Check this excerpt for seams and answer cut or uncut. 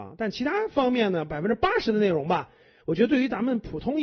uncut